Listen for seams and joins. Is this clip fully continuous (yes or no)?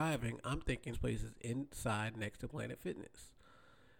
no